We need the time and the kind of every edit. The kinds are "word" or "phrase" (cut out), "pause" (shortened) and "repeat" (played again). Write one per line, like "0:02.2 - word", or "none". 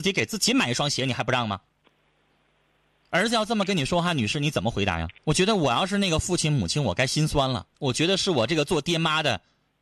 0:05.2 - pause
0:07.7 - pause